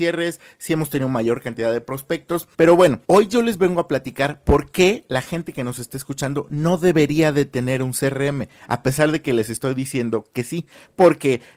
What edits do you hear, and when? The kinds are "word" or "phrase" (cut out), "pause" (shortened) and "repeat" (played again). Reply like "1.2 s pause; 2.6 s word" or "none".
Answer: 2.5 s pause; 3.0 s pause